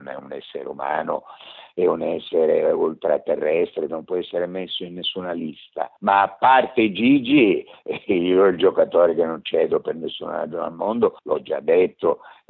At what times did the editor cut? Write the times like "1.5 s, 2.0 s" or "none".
3.9 s, 6.0 s, 11.2 s

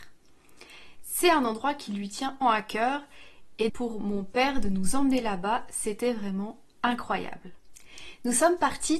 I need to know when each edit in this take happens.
2.4 s, 3.7 s

